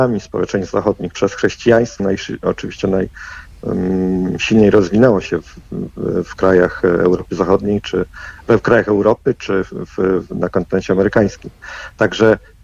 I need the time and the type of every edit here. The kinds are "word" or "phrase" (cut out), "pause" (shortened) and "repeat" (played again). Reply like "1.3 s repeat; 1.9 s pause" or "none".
1.1 s word; 2.0 s phrase

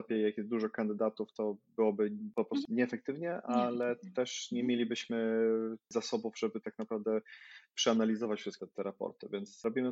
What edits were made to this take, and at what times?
8.6 s word

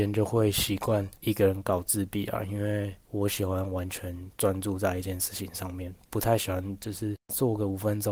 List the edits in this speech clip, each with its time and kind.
1.2 s pause; 3.0 s pause; 4.3 s pause; 6.0 s pause

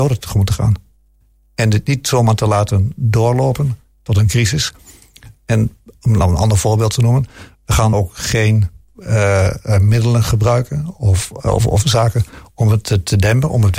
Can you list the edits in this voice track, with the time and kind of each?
7.9 s word

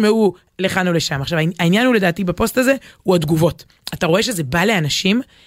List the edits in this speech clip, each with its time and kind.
none

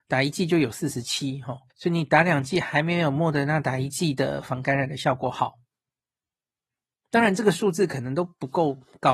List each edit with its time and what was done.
1.7 s pause

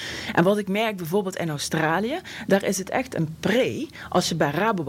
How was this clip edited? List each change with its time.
none

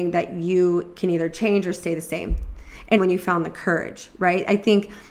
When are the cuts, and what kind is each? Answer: 3.0 s word

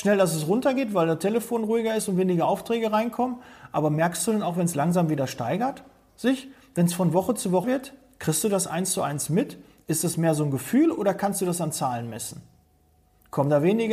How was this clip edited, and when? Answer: 7.6 s word

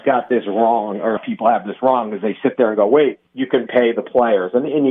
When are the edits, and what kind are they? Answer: 1.2 s word; 3.3 s pause; 3.7 s word

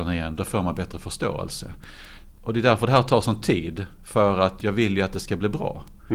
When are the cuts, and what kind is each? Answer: none

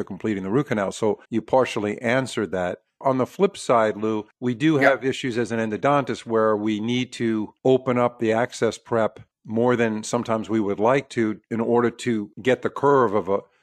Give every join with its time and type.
1.2 s pause; 9.3 s pause; 11.4 s pause; 12.3 s pause

